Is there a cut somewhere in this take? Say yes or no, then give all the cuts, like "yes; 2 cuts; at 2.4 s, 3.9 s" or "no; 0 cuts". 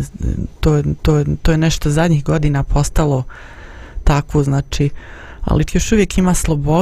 yes; 2 cuts; at 1.0 s, 5.7 s